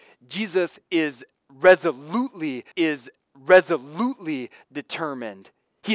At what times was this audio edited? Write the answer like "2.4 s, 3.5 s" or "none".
2.7 s